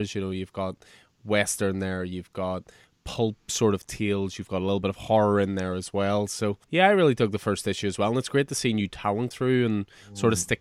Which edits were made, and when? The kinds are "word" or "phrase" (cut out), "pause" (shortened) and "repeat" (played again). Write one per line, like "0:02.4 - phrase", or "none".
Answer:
0:06.6 - pause
0:09.3 - word